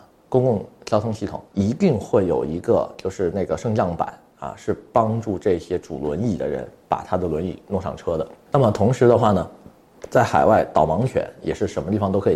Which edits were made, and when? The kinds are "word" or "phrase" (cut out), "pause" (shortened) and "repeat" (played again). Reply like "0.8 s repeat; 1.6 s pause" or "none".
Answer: 1.5 s pause